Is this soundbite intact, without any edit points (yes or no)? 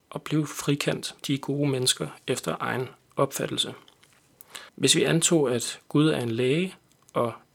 no